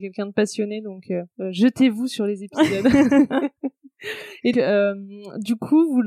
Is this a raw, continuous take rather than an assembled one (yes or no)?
no